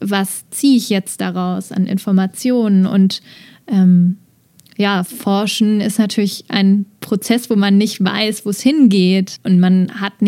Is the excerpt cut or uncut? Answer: uncut